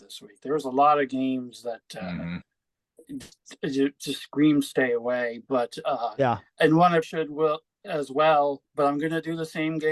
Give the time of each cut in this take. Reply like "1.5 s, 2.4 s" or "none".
7.0 s, 8.7 s